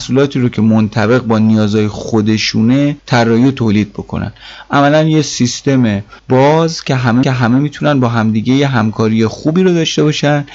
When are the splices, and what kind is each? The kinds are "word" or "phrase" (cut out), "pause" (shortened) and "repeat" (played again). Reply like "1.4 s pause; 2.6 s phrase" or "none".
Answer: 3.0 s pause; 6.2 s pause; 7.2 s repeat